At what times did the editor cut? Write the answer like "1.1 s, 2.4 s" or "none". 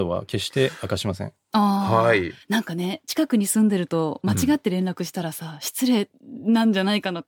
2.4 s